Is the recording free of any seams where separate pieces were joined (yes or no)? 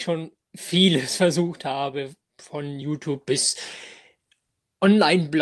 yes